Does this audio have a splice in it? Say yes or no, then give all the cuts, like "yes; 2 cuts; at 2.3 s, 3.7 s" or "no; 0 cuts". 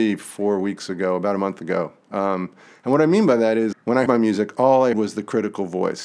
yes; 3 cuts; at 3.7 s, 4.1 s, 4.9 s